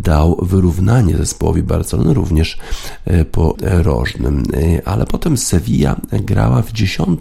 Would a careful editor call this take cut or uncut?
cut